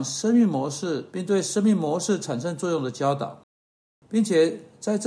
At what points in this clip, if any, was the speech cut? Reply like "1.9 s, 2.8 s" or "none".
1.1 s

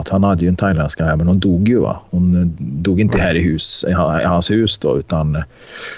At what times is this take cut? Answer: none

